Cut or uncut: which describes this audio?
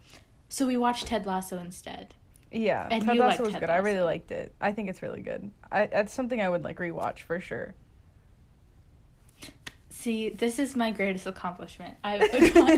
uncut